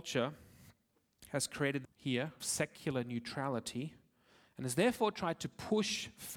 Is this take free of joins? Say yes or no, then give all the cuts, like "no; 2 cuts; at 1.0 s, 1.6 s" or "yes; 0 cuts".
no; 2 cuts; at 1.8 s, 2.4 s